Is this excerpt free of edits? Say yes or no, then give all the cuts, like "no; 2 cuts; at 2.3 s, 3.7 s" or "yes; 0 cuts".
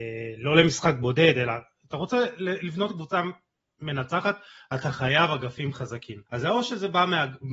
no; 1 cut; at 6.3 s